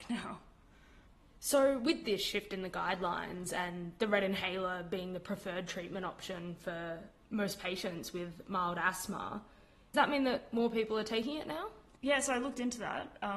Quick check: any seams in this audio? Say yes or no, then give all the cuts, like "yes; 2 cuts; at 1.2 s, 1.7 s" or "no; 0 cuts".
yes; 2 cuts; at 9.9 s, 12.0 s